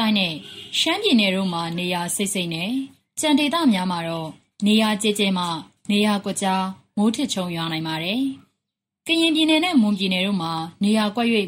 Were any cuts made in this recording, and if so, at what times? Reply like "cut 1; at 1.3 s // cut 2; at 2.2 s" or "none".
none

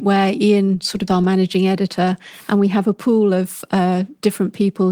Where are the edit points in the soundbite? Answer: cut 1; at 1.1 s

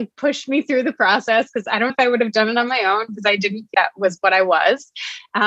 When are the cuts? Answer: cut 1; at 1.9 s // cut 2; at 3.7 s

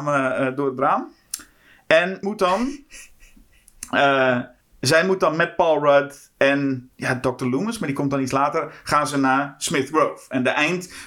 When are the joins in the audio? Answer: cut 1; at 2.2 s // cut 2; at 4.6 s // cut 3; at 6.9 s

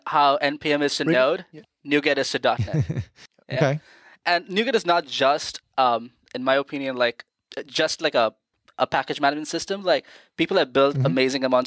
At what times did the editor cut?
none

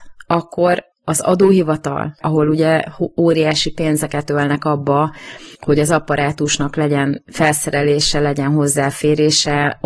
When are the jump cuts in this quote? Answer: cut 1; at 0.9 s // cut 2; at 5.5 s

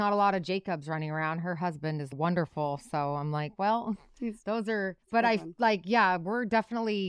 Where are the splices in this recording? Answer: cut 1; at 5.0 s

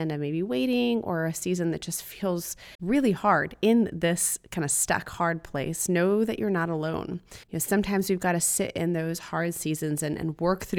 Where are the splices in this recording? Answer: cut 1; at 2.7 s // cut 2; at 7.4 s

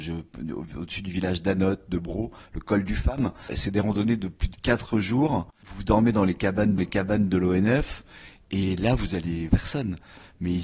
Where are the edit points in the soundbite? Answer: cut 1; at 6.8 s // cut 2; at 9.5 s

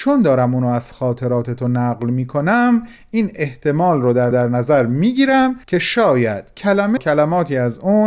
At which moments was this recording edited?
cut 1; at 4.3 s // cut 2; at 5.6 s // cut 3; at 7.0 s

